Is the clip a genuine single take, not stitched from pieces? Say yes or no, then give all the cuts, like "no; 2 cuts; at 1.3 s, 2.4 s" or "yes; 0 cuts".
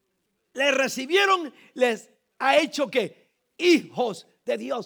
yes; 0 cuts